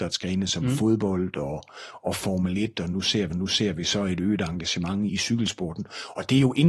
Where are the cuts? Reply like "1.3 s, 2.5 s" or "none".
3.3 s, 5.1 s